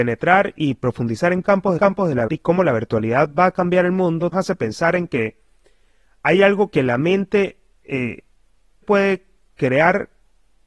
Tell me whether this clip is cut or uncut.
cut